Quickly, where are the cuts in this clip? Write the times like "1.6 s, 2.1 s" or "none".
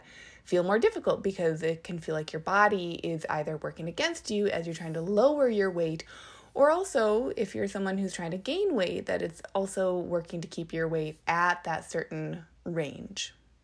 none